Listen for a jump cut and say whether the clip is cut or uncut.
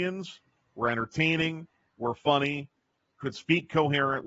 uncut